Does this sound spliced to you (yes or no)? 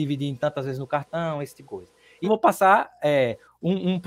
yes